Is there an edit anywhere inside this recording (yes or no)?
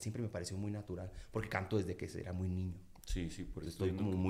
no